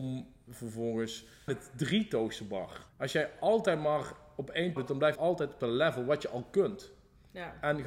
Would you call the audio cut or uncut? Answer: cut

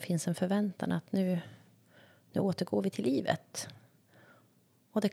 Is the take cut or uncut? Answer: uncut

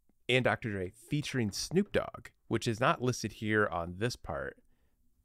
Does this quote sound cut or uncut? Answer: uncut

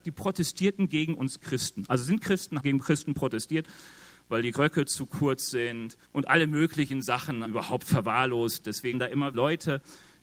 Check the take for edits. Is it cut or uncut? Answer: cut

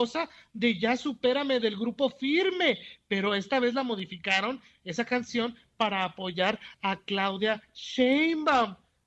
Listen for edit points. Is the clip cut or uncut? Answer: uncut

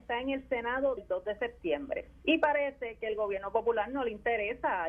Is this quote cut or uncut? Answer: cut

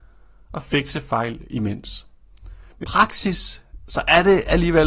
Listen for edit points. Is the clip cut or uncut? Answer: cut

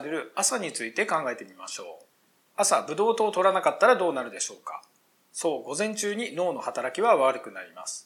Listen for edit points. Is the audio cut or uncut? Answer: uncut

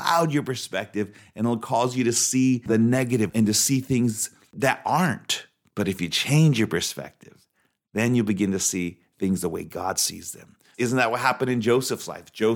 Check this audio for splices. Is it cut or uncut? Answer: uncut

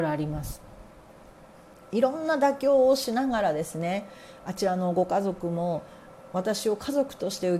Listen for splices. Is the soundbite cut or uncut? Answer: uncut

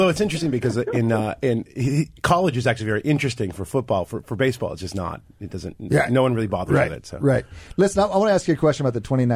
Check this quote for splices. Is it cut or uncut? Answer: uncut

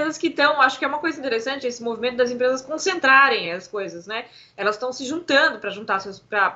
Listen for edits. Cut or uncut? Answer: uncut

